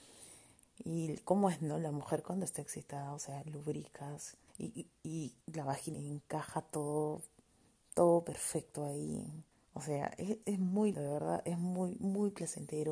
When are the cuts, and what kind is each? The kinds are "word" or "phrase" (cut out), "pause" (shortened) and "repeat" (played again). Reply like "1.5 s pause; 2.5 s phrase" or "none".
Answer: 4.5 s pause; 5.4 s pause; 5.9 s phrase; 9.5 s pause; 10.4 s word; 10.9 s word